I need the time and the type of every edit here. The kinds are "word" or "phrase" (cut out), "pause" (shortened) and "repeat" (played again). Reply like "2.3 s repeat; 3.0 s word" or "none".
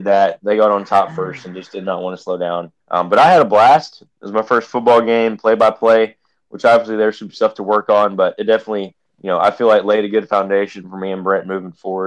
2.8 s pause